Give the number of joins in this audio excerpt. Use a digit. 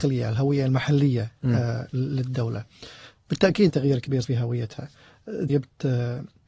3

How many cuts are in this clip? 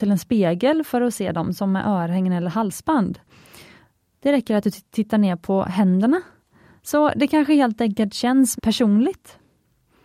1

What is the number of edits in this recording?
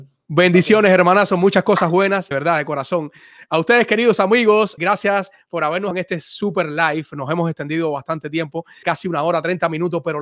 4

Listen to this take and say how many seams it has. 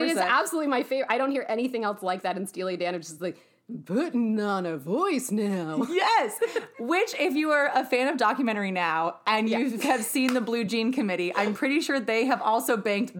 0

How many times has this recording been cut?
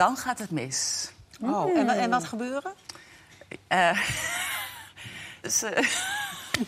2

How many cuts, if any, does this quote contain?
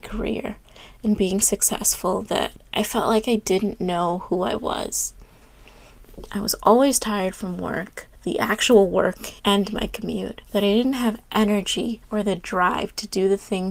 4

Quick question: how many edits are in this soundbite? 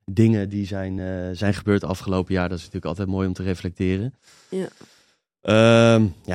0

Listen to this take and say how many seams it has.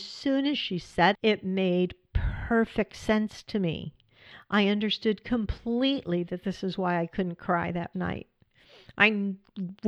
2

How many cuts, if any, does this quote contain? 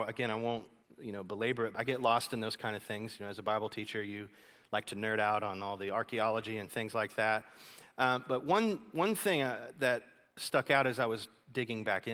1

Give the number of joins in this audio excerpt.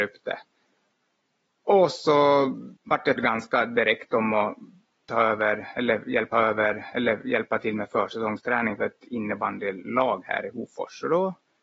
3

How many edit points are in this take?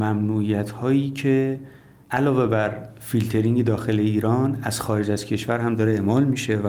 0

